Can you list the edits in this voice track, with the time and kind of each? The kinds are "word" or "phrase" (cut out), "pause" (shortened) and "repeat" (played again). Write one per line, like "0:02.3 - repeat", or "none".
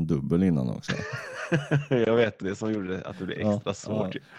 0:02.4 - word

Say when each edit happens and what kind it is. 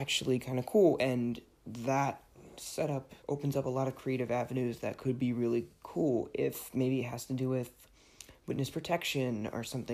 0:03.2 - pause

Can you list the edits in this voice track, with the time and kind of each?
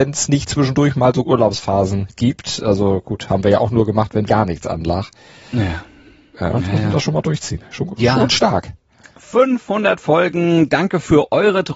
0:01.2 - word
0:04.3 - word
0:08.0 - word

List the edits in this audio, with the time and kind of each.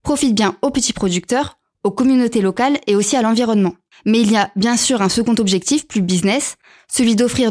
none

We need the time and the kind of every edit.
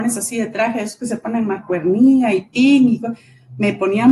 none

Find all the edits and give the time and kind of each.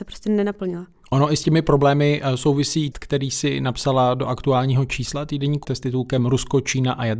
0:02.9 - word
0:05.6 - word

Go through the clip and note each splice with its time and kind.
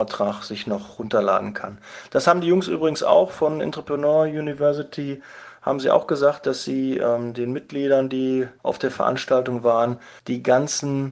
0:08.6 - pause
0:10.2 - pause

